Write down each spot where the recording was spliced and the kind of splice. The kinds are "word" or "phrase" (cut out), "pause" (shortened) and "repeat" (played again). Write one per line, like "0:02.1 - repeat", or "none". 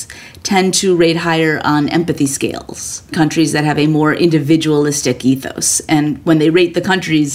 0:03.1 - word